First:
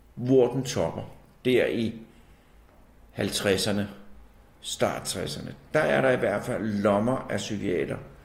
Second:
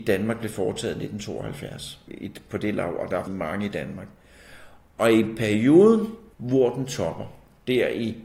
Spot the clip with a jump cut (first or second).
second